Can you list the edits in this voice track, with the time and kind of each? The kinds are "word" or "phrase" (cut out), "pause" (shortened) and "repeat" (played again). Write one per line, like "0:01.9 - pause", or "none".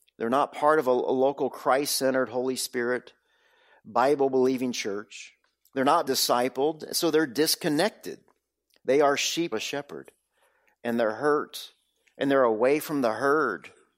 0:06.1 - word
0:09.5 - word